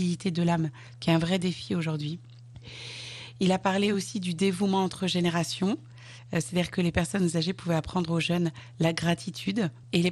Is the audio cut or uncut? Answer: uncut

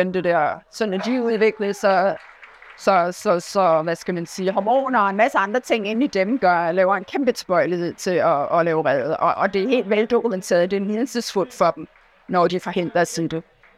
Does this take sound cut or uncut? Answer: uncut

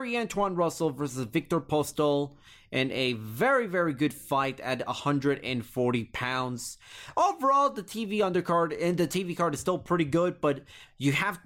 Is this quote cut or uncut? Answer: uncut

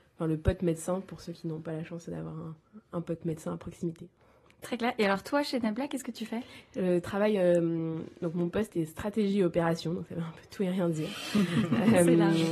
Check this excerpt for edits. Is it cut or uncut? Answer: uncut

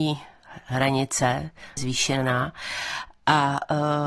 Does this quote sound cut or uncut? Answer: cut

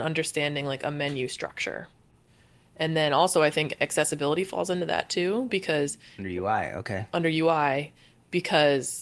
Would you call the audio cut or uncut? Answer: uncut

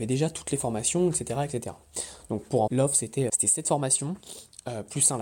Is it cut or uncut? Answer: cut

